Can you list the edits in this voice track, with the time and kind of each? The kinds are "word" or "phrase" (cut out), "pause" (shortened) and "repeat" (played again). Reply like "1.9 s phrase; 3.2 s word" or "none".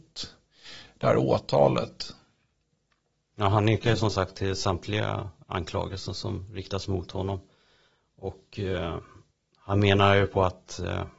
none